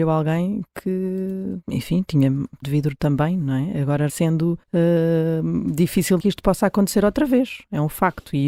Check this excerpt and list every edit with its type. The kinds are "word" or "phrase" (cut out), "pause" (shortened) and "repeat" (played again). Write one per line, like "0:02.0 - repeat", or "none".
0:01.6 - pause
0:02.6 - word
0:04.1 - phrase
0:04.6 - pause
0:06.2 - word

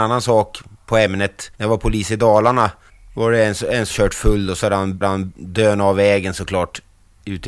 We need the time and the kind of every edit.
0:01.5 - pause
0:02.9 - pause
0:03.9 - word
0:05.0 - repeat

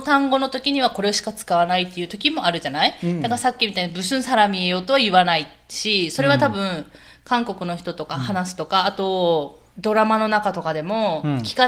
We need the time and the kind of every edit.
0:09.7 - pause

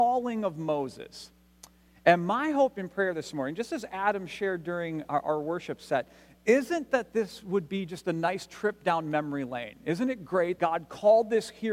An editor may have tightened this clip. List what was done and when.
0:10.6 - word

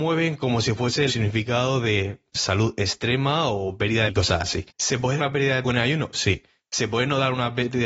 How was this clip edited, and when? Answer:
0:01.1 - phrase
0:02.3 - pause
0:04.1 - phrase
0:04.7 - pause
0:05.2 - word
0:05.6 - word

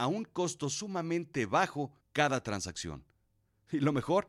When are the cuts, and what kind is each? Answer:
0:02.0 - pause

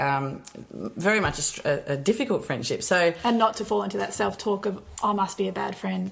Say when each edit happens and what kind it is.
none

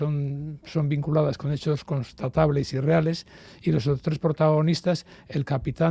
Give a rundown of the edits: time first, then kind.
none

